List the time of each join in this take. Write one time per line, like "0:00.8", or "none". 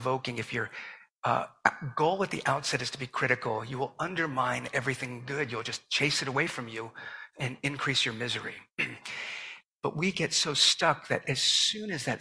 none